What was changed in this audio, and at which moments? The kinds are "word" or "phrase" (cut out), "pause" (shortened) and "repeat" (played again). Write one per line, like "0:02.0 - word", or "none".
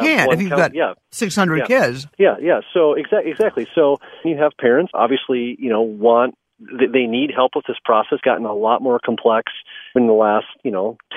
0:01.0 - pause
0:02.1 - pause
0:04.2 - phrase
0:04.9 - word
0:08.2 - word
0:10.0 - word